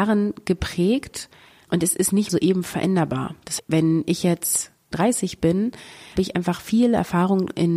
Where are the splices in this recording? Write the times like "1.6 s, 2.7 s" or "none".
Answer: 1.7 s, 2.3 s, 3.6 s, 4.9 s, 6.2 s